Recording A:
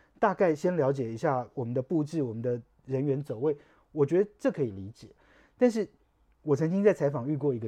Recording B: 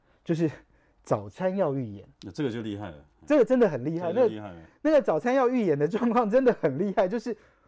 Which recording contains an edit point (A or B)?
B